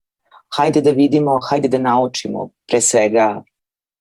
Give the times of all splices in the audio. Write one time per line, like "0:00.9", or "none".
none